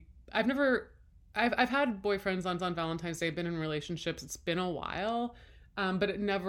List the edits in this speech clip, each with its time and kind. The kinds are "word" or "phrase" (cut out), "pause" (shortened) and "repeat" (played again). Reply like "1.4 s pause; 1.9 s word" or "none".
2.6 s repeat